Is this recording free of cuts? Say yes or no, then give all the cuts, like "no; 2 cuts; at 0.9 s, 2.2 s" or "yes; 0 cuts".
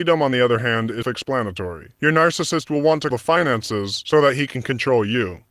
no; 2 cuts; at 1.0 s, 3.1 s